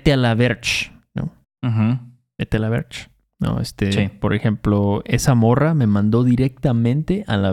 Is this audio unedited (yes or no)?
yes